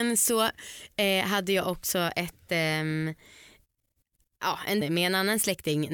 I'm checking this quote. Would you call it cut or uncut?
cut